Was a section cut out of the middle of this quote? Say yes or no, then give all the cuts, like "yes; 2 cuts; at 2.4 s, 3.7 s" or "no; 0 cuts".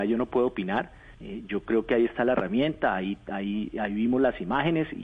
yes; 1 cut; at 1.1 s